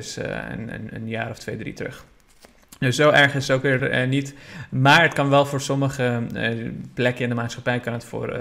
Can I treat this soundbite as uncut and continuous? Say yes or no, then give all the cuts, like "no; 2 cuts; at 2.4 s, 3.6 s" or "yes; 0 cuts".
yes; 0 cuts